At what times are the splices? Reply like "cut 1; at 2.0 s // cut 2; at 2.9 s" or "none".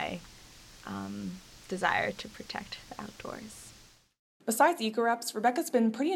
none